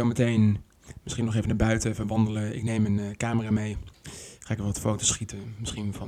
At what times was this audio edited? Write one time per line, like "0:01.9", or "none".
0:03.9